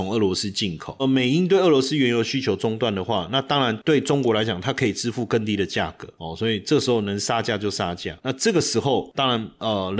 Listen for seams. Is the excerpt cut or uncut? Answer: cut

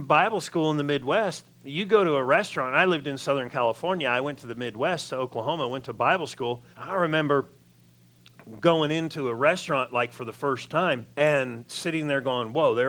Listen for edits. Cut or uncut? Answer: cut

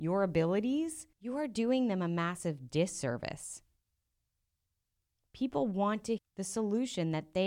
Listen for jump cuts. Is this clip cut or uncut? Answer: cut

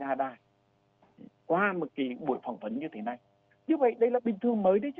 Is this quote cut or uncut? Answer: uncut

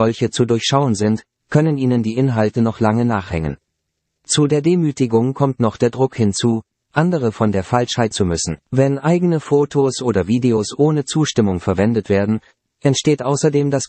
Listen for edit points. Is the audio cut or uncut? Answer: cut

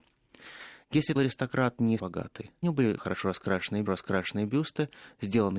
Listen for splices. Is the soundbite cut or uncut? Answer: cut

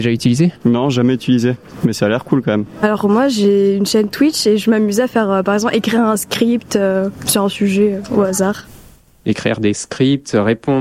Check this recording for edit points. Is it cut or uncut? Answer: uncut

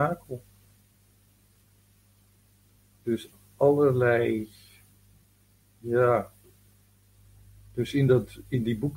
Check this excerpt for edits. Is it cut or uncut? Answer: uncut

